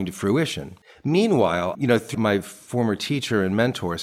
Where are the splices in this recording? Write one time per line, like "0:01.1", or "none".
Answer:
0:02.1